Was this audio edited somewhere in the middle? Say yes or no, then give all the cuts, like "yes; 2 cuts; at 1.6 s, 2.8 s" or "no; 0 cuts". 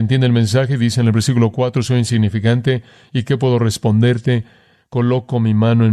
no; 0 cuts